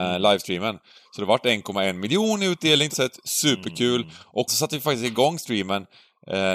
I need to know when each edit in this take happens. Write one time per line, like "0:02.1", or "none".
0:02.9
0:04.5